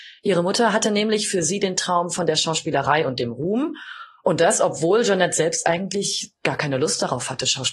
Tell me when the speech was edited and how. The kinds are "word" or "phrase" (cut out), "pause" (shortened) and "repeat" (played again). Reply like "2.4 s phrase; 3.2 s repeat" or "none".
none